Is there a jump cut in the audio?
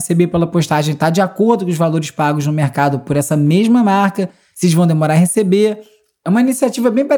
no; 0 cuts

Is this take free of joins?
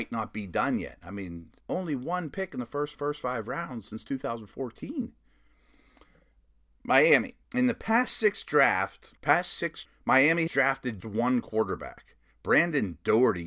no; 8 cuts; at 1.6 s, 2.9 s, 7.4 s, 9.2 s, 9.8 s, 10.5 s, 11.0 s, 12.3 s

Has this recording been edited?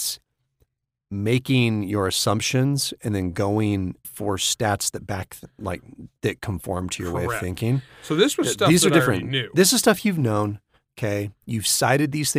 yes; 1 cut; at 4.0 s

